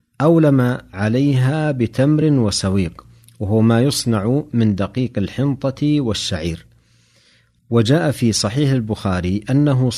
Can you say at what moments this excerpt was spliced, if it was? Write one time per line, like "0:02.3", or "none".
none